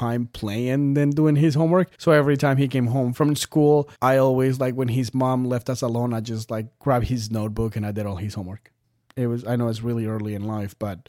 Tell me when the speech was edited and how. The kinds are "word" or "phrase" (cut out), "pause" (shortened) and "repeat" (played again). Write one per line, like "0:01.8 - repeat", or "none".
0:01.9 - pause
0:03.9 - pause
0:09.0 - pause